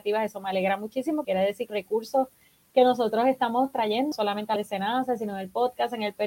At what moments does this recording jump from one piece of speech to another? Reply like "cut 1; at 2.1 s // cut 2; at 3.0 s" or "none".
cut 1; at 1.2 s // cut 2; at 1.7 s // cut 3; at 4.1 s // cut 4; at 4.6 s